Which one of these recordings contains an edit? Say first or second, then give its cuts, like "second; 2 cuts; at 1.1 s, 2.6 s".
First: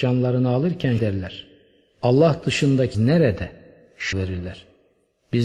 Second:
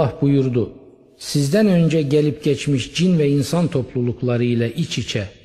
first; 3 cuts; at 1.0 s, 2.9 s, 4.1 s